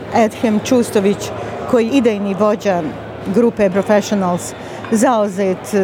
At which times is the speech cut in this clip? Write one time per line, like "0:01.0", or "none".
0:01.9
0:03.7